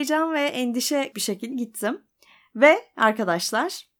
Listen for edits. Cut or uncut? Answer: cut